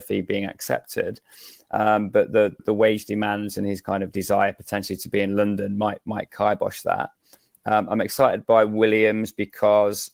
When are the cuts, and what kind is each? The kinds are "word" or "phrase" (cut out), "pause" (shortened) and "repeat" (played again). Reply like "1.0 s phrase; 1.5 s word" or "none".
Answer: 2.6 s word